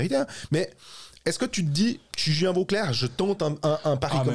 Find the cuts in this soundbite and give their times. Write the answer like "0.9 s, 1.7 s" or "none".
none